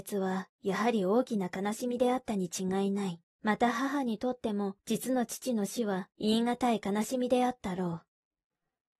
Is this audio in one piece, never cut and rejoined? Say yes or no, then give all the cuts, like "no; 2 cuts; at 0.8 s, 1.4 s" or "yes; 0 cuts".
no; 1 cut; at 3.2 s